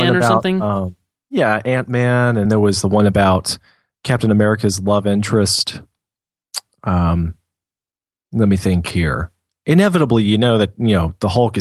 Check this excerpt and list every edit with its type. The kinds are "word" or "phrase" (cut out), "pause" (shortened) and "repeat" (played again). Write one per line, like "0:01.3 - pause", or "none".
0:02.4 - word